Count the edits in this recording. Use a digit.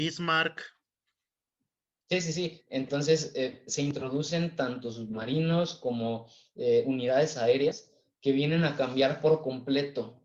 0